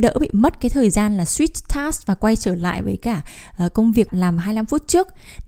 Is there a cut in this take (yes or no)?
yes